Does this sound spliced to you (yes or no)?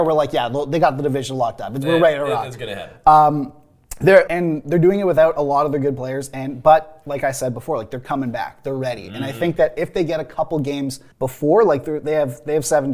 yes